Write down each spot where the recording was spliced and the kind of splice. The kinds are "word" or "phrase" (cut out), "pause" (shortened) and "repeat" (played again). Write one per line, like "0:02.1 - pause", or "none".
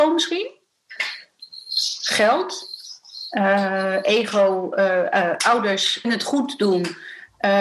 0:06.0 - word